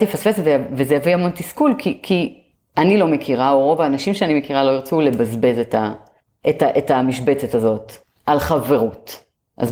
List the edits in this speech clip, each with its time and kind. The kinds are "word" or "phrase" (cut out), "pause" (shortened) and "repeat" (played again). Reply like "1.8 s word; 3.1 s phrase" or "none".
none